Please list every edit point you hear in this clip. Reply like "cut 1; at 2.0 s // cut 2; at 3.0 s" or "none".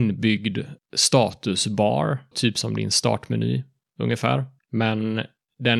cut 1; at 2.3 s